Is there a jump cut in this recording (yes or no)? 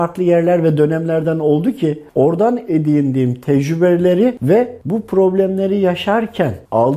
no